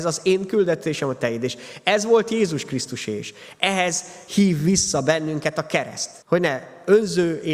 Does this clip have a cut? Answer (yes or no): yes